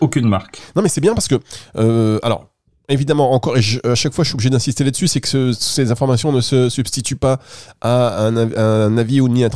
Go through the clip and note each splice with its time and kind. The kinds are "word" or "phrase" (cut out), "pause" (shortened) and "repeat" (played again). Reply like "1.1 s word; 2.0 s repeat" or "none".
none